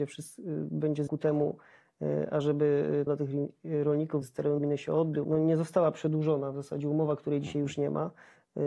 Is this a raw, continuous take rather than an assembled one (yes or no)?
no